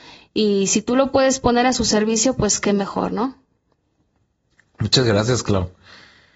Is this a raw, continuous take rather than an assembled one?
yes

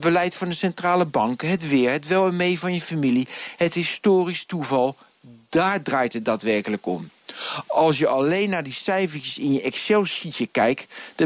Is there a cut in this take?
no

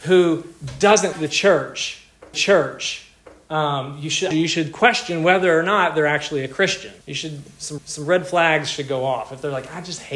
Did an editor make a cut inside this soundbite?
yes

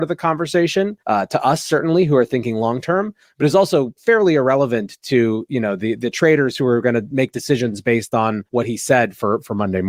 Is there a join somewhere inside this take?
yes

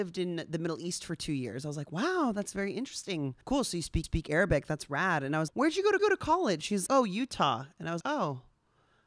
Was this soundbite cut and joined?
yes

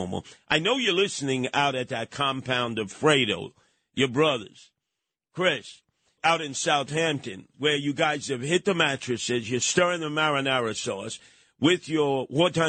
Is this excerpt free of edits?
no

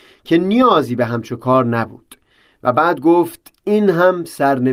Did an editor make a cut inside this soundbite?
no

